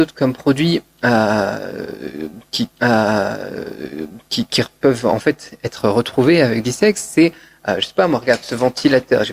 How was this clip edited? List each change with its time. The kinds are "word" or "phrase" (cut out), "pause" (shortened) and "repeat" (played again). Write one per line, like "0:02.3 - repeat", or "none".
0:02.7 - repeat
0:06.6 - phrase